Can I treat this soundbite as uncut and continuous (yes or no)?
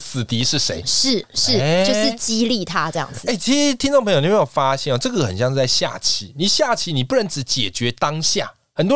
yes